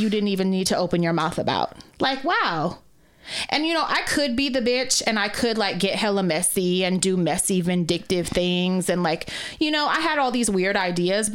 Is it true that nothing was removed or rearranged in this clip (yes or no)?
no